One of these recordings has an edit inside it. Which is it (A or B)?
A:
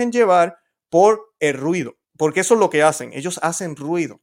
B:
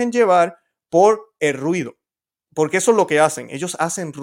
A